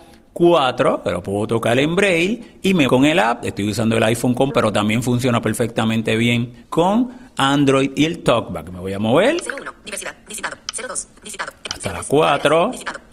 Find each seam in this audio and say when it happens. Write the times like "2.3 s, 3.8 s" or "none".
2.9 s, 4.5 s, 6.6 s, 11.2 s